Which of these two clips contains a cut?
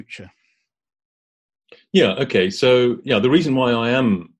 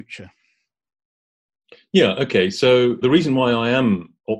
second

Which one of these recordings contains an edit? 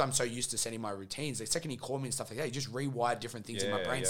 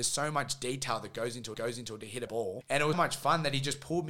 second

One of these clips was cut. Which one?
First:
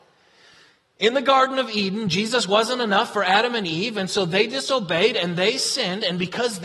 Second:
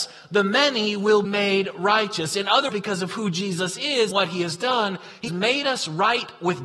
second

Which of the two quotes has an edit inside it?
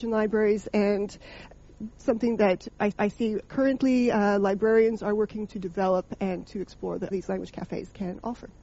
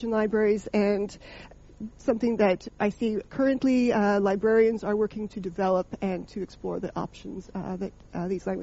first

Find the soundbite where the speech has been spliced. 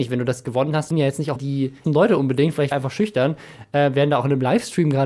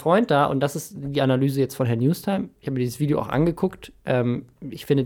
first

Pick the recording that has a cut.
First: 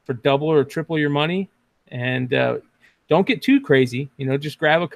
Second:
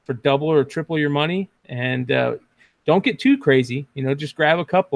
second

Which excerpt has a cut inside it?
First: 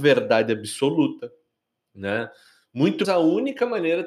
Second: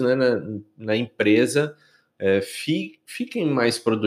first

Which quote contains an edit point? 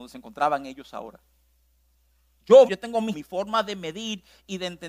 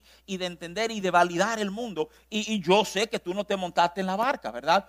first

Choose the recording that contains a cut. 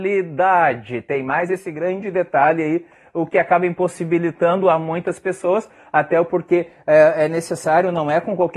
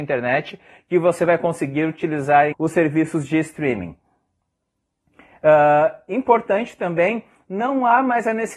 second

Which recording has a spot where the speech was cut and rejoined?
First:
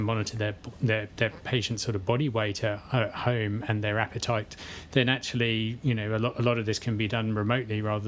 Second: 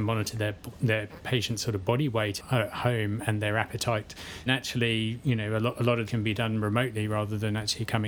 second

